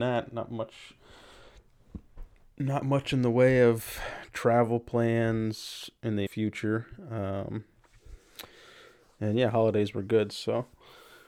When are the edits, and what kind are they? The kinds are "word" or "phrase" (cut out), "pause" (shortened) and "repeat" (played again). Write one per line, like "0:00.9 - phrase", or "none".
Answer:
0:06.3 - word